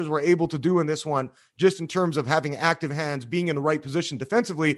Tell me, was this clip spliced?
no; 0 cuts

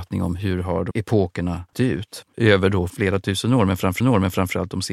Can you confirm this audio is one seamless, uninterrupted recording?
no; 4 cuts; at 0.9 s, 1.7 s, 2.9 s, 4.0 s

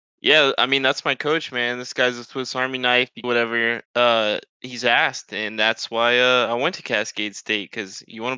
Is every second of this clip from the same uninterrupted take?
no; 2 cuts; at 3.2 s, 3.8 s

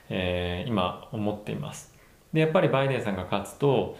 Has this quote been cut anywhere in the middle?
no; 0 cuts

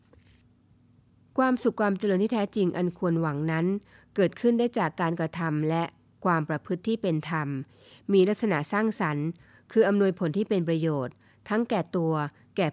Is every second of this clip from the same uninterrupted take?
yes; 0 cuts

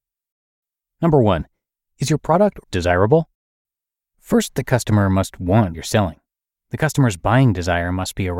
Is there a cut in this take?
yes; 2 cuts; at 2.6 s, 5.7 s

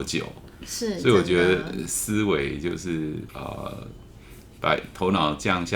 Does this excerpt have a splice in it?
yes; 1 cut; at 3.3 s

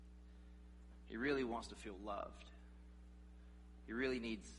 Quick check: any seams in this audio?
no; 0 cuts

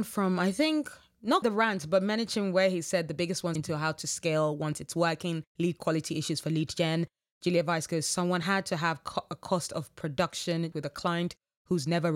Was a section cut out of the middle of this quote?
yes; 5 cuts; at 1.4 s, 3.6 s, 5.5 s, 8.4 s, 10.7 s

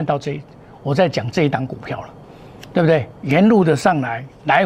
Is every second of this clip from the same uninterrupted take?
no; 2 cuts; at 2.7 s, 3.1 s

